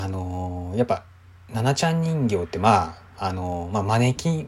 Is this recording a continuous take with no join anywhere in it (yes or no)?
yes